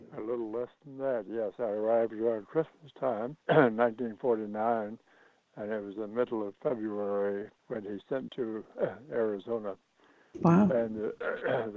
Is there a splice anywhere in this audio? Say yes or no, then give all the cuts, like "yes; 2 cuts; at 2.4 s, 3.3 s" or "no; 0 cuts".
yes; 3 cuts; at 3.4 s, 7.6 s, 8.3 s